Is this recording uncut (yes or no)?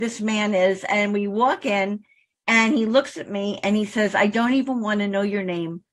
yes